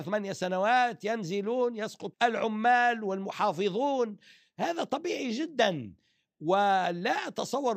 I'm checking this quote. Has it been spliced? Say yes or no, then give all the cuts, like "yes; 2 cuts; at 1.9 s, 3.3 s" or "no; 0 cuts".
yes; 1 cut; at 2.1 s